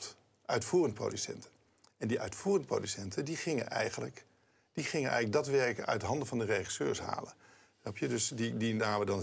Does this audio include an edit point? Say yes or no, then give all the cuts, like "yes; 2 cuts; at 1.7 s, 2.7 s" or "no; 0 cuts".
no; 0 cuts